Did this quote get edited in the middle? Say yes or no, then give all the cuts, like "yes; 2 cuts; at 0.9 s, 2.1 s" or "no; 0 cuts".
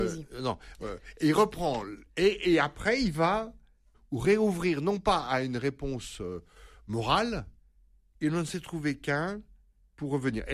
no; 0 cuts